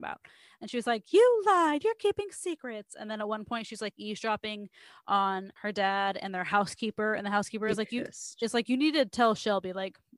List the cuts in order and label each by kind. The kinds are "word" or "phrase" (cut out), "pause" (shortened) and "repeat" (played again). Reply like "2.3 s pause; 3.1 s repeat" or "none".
5.6 s pause